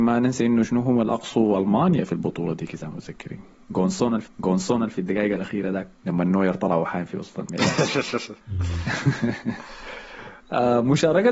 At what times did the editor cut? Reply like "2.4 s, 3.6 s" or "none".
4.3 s, 6.0 s, 8.4 s